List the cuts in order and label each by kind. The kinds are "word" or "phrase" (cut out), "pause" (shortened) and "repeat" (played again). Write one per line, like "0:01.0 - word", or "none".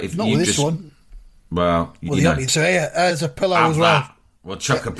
0:02.1 - word
0:02.5 - word
0:03.1 - word